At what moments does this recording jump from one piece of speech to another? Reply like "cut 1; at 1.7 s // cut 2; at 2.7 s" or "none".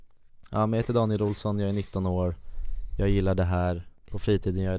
none